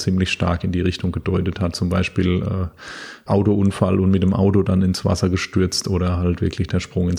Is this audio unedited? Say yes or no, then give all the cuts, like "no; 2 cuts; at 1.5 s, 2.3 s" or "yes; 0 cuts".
no; 1 cut; at 3.3 s